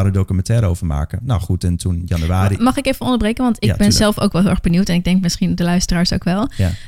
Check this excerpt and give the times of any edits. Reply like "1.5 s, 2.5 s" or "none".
none